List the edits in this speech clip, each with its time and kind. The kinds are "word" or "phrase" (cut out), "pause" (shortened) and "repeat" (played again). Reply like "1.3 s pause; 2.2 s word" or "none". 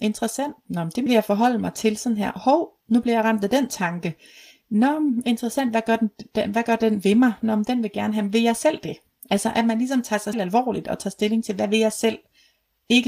1.1 s phrase; 10.3 s word